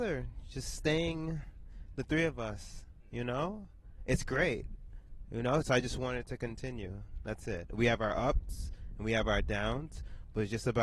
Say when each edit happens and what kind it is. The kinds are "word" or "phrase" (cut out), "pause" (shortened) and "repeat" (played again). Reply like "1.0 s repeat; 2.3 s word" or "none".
none